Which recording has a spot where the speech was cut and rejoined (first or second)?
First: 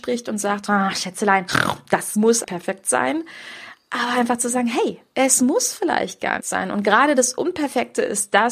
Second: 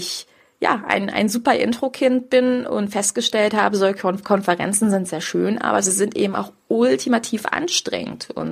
first